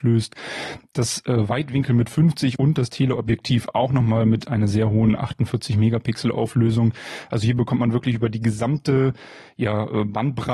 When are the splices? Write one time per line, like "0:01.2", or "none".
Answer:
none